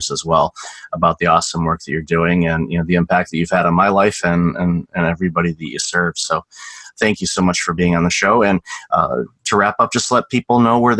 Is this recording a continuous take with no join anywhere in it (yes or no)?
yes